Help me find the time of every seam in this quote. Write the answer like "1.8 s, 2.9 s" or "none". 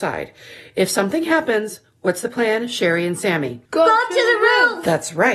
3.7 s